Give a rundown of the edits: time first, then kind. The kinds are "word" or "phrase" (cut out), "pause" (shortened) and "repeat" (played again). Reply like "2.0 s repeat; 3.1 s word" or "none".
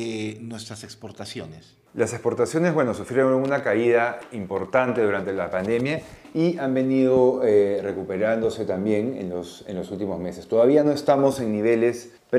1.9 s pause